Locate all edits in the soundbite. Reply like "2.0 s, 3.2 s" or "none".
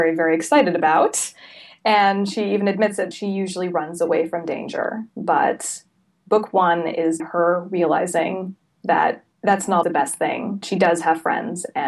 3.1 s, 5.1 s, 7.2 s, 9.3 s, 9.8 s, 10.6 s